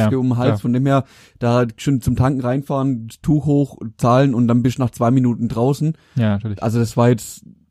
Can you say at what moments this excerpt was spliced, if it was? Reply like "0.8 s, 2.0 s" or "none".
none